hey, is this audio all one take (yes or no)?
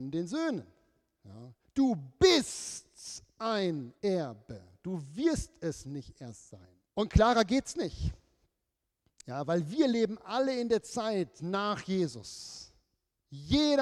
no